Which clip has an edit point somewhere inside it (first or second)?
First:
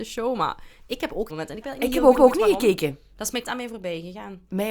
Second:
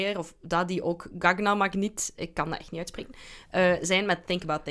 first